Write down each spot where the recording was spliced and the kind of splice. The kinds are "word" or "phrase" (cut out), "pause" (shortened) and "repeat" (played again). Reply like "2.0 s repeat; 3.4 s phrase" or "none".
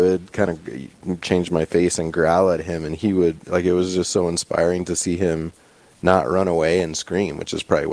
none

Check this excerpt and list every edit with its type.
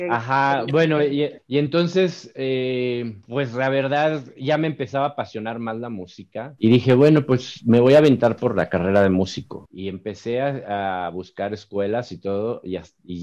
none

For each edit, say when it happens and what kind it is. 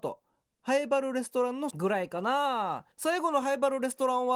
1.7 s word; 2.9 s pause

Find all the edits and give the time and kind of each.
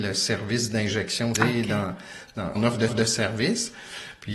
1.3 s word; 2.6 s phrase; 2.9 s repeat

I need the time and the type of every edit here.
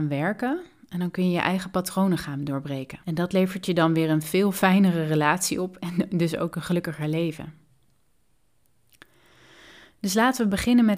3.0 s pause

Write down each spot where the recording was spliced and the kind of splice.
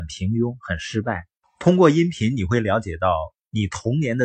1.4 s pause

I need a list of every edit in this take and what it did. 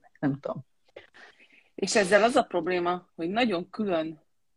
none

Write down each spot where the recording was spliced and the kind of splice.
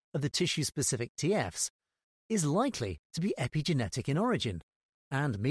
none

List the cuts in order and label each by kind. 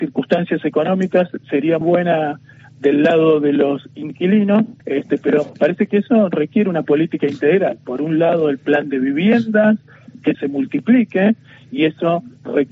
1.8 s word; 4.8 s pause; 10.3 s phrase

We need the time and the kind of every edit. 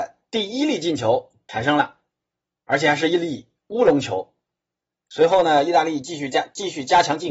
none

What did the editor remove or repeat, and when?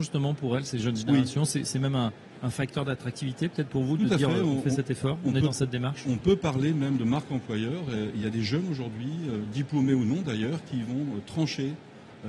none

